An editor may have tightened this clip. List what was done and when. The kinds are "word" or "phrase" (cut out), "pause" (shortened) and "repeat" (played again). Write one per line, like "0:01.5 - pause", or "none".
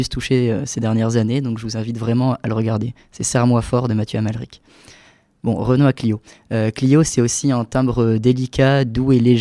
none